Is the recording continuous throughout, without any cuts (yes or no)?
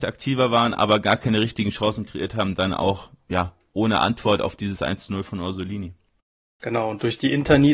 yes